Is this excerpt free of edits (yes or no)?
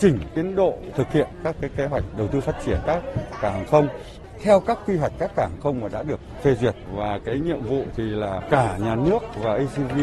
yes